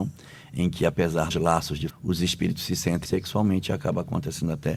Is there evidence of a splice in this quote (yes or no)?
yes